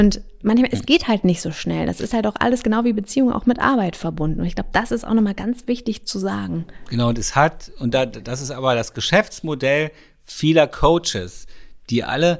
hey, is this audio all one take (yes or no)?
yes